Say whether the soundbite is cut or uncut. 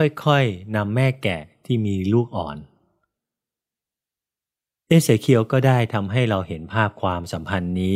uncut